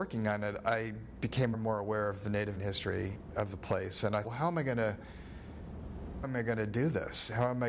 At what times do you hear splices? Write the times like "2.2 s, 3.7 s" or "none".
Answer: 1.5 s, 2.6 s, 4.2 s, 6.2 s